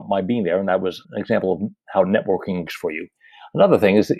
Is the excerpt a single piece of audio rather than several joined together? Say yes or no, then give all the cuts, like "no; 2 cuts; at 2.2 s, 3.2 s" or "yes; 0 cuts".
no; 2 cuts; at 1.0 s, 2.7 s